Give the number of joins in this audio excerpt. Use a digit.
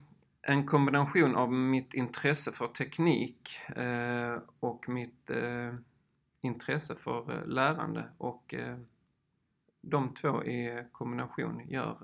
0